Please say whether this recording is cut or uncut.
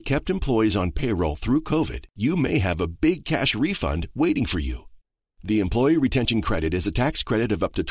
uncut